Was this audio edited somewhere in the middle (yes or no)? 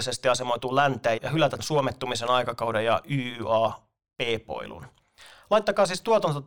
yes